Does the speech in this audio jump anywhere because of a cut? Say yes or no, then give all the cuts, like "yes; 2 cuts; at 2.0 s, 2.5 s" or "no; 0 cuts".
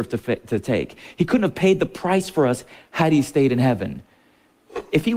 no; 0 cuts